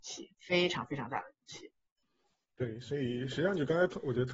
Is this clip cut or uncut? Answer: uncut